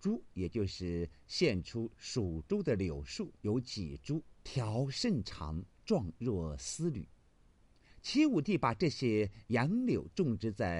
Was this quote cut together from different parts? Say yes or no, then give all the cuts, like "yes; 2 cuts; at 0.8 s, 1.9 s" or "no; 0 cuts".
yes; 3 cuts; at 3.4 s, 4.4 s, 5.7 s